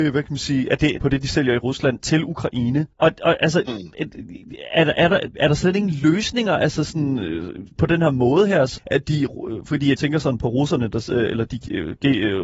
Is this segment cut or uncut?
cut